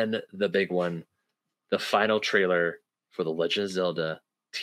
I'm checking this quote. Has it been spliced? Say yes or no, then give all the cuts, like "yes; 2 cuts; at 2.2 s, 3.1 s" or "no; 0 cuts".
no; 0 cuts